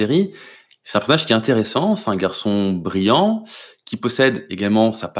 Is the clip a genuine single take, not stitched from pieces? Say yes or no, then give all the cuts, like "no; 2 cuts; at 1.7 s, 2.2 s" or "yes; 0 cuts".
yes; 0 cuts